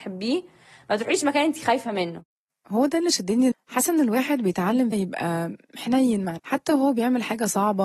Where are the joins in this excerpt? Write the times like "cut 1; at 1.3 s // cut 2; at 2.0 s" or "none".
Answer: cut 1; at 2.5 s // cut 2; at 3.5 s // cut 3; at 4.9 s // cut 4; at 6.4 s